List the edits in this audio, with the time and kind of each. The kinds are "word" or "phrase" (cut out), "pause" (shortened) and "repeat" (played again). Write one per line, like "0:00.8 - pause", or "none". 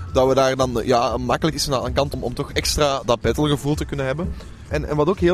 0:01.5 - word
0:02.1 - word
0:03.0 - word